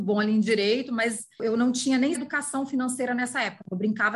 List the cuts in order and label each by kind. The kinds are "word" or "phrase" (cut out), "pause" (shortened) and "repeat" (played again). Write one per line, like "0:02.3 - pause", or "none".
0:02.1 - word